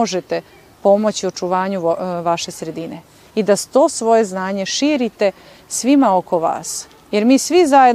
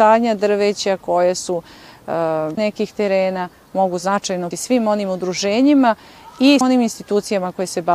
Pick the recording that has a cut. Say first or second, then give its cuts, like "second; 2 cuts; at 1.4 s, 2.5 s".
second; 3 cuts; at 2.6 s, 4.5 s, 6.6 s